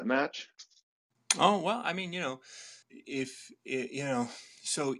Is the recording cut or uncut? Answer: cut